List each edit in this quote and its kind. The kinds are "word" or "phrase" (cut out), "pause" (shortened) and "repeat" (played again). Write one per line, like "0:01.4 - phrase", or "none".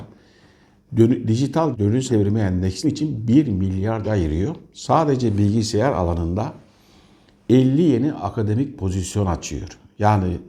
0:01.7 - word
0:02.1 - word
0:02.8 - word
0:04.0 - phrase